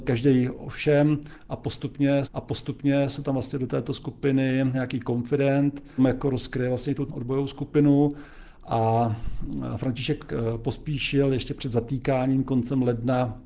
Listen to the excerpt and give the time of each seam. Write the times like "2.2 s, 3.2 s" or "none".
2.2 s, 4.7 s, 6.0 s, 7.1 s